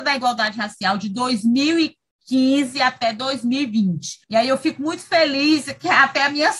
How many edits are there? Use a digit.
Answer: 1